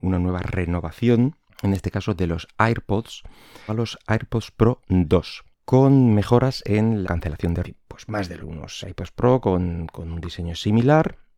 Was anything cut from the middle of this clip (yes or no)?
yes